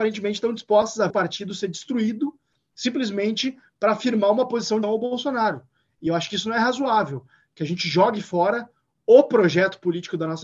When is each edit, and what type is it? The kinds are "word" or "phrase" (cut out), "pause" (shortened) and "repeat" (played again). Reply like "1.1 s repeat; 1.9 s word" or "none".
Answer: 1.1 s phrase; 4.8 s word